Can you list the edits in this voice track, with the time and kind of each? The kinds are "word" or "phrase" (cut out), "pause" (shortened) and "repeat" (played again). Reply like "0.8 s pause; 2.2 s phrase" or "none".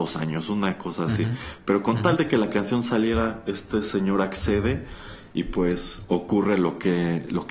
none